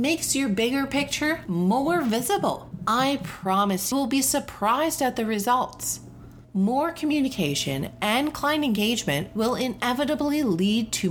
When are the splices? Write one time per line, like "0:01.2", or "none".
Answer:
0:03.9